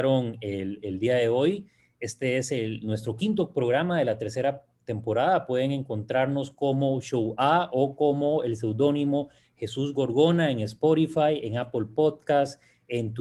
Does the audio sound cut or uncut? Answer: uncut